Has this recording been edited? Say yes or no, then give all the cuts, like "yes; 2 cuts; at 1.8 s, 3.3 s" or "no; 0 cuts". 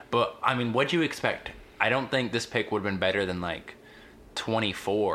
no; 0 cuts